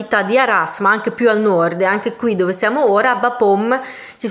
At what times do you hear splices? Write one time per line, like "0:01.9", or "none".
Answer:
none